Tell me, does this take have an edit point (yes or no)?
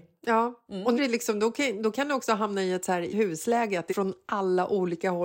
yes